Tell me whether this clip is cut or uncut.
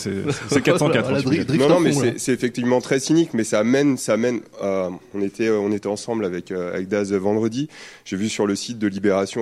uncut